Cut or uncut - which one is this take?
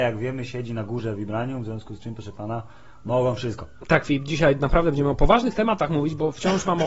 uncut